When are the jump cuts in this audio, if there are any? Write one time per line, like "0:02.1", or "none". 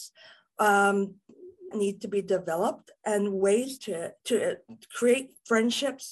0:01.7
0:03.8
0:04.2